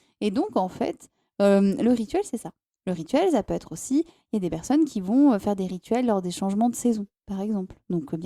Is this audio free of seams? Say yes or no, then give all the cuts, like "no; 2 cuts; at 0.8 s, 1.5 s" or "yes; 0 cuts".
yes; 0 cuts